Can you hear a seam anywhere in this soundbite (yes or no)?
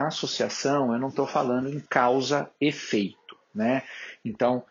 no